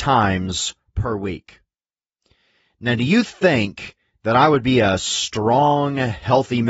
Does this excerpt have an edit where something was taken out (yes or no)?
no